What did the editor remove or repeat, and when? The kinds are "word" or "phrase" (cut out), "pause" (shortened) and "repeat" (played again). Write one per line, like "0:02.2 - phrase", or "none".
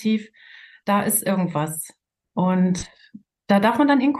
none